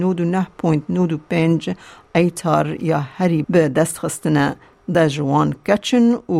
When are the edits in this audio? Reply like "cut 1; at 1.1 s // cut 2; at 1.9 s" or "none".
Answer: cut 1; at 2.1 s // cut 2; at 3.4 s // cut 3; at 4.9 s